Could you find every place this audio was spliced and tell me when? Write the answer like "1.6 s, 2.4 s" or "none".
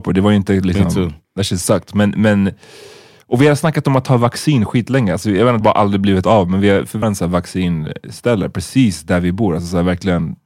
1.2 s, 5.6 s, 7.0 s